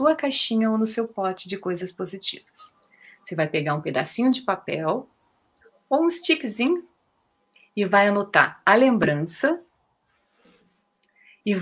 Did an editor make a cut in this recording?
no; 0 cuts

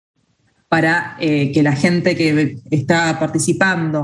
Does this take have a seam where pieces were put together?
no; 0 cuts

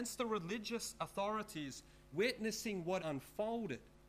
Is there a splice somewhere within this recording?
yes; 2 cuts; at 2.1 s, 3.0 s

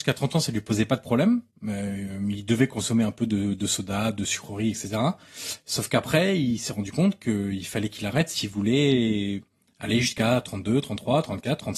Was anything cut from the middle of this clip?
no; 0 cuts

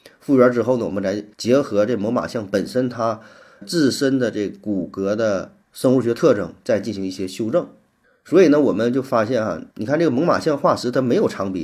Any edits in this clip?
yes; 5 cuts; at 1.3 s, 3.6 s, 5.6 s, 8.0 s, 9.7 s

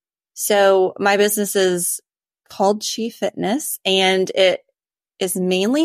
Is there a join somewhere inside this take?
no; 0 cuts

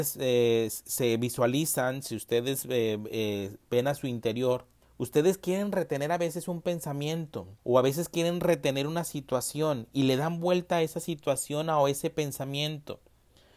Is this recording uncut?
no; 2 cuts; at 4.8 s, 7.6 s

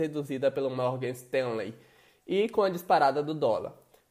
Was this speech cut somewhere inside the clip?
no; 0 cuts

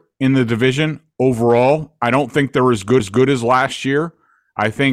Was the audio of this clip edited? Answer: yes; 1 cut; at 3.0 s

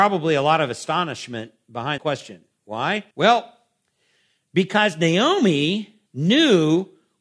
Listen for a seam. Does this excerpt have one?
yes; 3 cuts; at 2.0 s, 3.1 s, 6.1 s

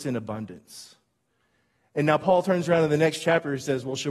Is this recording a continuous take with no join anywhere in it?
yes; 0 cuts

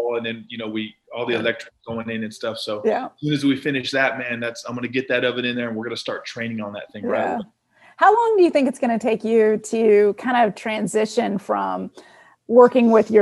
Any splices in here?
no; 0 cuts

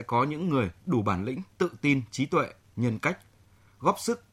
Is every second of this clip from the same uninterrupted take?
yes; 0 cuts

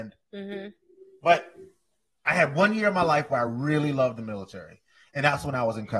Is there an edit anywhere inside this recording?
no; 0 cuts

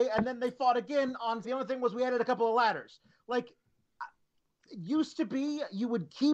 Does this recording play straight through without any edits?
no; 1 cut; at 1.4 s

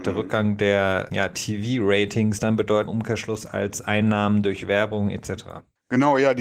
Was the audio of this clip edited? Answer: yes; 3 cuts; at 1.1 s, 2.4 s, 2.9 s

